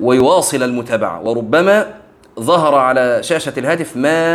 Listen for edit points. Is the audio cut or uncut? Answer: uncut